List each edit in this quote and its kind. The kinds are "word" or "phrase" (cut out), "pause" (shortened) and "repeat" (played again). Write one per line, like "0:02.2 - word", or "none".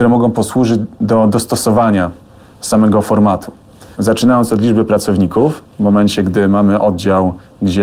none

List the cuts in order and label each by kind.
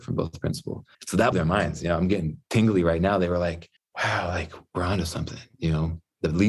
0:00.9 - pause
0:01.3 - word
0:03.8 - pause

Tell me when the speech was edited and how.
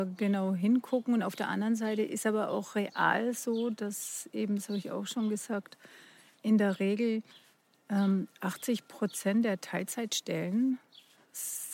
none

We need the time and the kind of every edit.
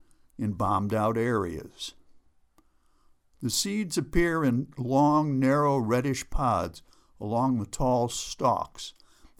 none

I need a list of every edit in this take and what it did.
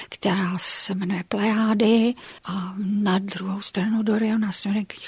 0:02.4 - pause

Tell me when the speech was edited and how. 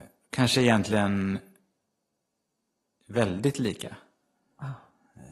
none

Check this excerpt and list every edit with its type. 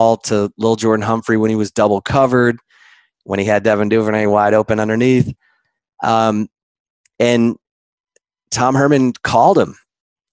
none

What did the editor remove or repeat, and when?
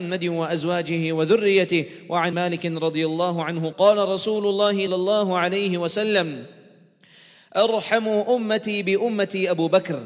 0:02.3 - phrase
0:03.7 - word
0:04.9 - word

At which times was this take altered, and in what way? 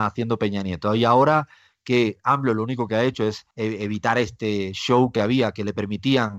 0:03.5 - pause

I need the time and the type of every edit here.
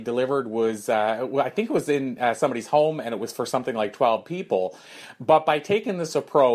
none

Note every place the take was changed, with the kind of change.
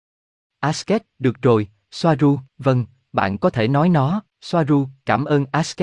0:02.5 - pause
0:04.3 - pause

